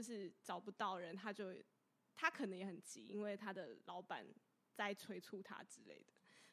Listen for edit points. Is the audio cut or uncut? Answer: uncut